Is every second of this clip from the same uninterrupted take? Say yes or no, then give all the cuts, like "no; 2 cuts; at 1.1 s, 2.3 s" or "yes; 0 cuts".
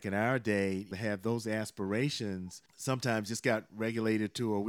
no; 2 cuts; at 0.9 s, 2.7 s